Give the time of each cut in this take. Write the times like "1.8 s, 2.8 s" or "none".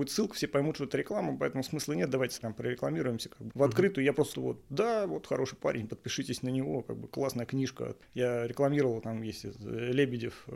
2.4 s, 3.5 s, 4.3 s